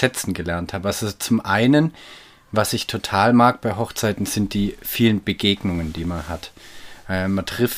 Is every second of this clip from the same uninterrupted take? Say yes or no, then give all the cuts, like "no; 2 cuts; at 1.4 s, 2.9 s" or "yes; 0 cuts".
yes; 0 cuts